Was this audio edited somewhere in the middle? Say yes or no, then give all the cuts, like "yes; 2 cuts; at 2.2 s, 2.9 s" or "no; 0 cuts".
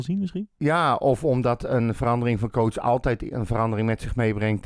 no; 0 cuts